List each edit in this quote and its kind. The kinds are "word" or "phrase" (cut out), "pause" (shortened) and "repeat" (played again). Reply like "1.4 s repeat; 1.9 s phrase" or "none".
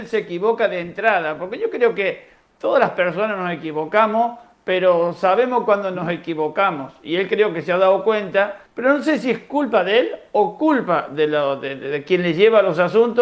8.7 s pause